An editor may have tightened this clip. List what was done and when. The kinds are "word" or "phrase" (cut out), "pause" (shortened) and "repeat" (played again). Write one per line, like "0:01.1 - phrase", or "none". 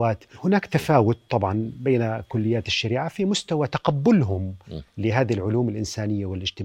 none

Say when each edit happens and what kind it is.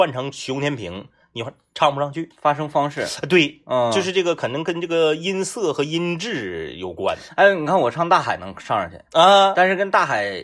none

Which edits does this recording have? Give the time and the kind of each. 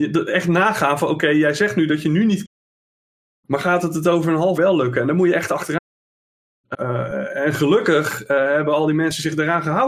0:04.6 - word
0:06.7 - word

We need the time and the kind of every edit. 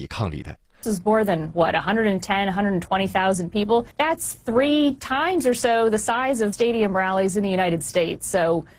0:03.9 - pause
0:06.5 - phrase

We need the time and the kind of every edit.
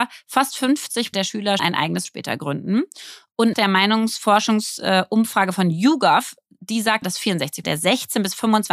0:01.1 - word
0:01.6 - word
0:02.1 - word
0:03.5 - word
0:07.0 - word
0:07.6 - word

